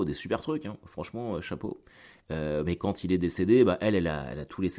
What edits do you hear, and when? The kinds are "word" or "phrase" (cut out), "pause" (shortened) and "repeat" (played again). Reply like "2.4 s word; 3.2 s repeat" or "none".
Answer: none